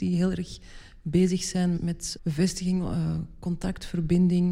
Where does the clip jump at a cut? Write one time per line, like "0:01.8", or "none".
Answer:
0:01.7
0:02.2